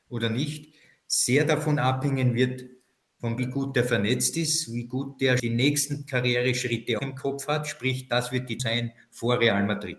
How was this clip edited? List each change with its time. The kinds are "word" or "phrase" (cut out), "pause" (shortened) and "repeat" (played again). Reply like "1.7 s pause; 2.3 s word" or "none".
3.4 s word; 5.4 s word; 7.0 s word; 8.6 s word

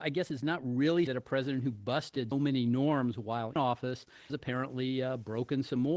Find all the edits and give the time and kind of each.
1.1 s word; 2.3 s word; 3.6 s word; 4.3 s word

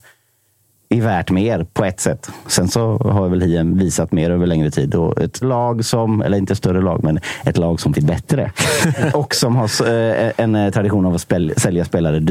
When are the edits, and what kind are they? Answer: 5.4 s word; 7.9 s phrase; 9.1 s word

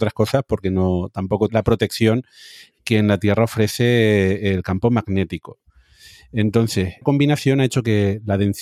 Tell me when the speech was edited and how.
1.5 s word; 7.0 s word

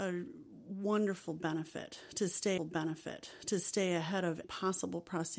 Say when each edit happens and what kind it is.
2.6 s repeat; 4.4 s word

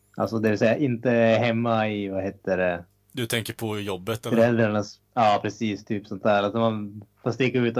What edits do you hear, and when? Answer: 5.0 s pause

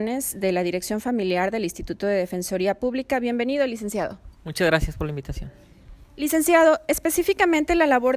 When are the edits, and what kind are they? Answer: 4.4 s pause

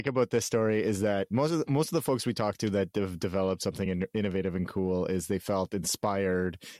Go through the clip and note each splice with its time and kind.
none

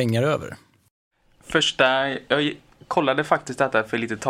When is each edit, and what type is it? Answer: none

